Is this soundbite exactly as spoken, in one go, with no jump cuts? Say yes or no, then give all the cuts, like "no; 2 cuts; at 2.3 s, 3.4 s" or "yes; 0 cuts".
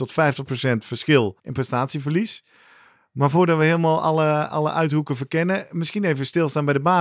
no; 1 cut; at 1.4 s